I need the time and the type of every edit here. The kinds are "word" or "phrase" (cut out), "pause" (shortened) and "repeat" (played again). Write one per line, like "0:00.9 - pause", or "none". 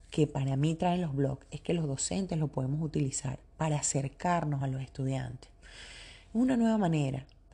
none